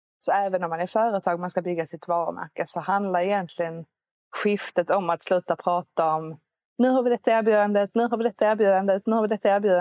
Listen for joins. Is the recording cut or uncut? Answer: uncut